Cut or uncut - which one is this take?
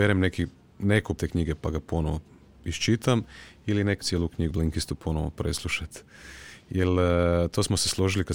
cut